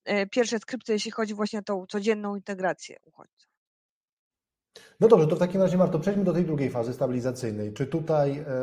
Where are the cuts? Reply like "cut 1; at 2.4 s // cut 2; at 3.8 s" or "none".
none